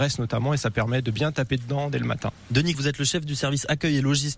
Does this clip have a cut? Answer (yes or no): yes